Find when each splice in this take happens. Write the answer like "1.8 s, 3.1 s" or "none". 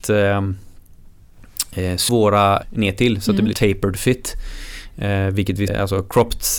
2.1 s, 2.6 s, 3.5 s, 5.7 s